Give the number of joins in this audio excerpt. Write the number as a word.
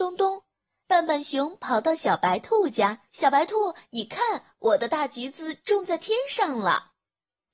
one